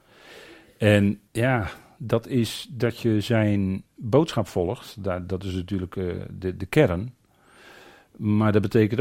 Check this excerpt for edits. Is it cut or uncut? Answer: cut